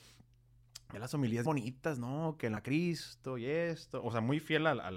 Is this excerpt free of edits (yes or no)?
no